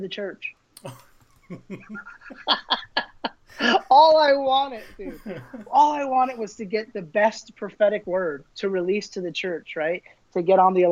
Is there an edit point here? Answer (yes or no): yes